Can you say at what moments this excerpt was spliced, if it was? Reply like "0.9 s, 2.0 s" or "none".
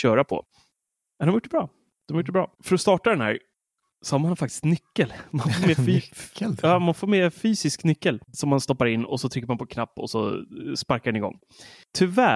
2.5 s, 8.3 s